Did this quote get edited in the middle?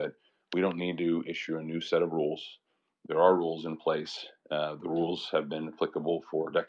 no; 0 cuts

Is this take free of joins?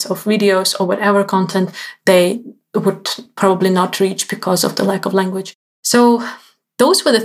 yes; 0 cuts

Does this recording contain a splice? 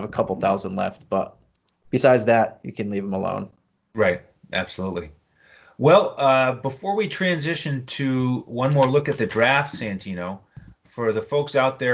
no; 0 cuts

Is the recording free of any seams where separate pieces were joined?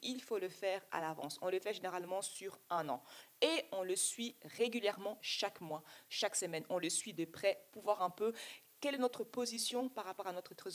yes; 0 cuts

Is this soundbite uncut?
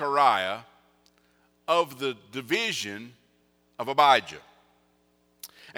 yes; 0 cuts

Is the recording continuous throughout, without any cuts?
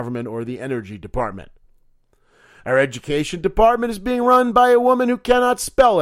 yes; 0 cuts

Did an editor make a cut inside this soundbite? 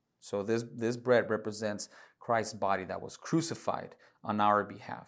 no; 0 cuts

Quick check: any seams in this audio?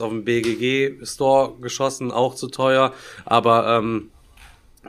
no; 0 cuts

